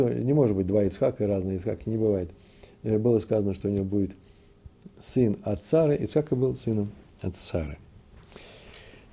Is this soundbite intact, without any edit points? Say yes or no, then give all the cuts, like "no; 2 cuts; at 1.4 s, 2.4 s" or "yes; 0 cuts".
yes; 0 cuts